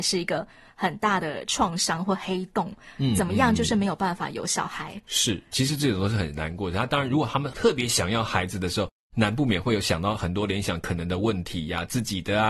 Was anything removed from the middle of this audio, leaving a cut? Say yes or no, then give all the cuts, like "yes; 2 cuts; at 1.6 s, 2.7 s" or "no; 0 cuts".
no; 0 cuts